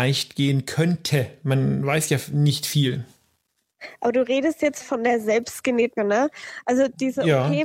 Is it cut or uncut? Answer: cut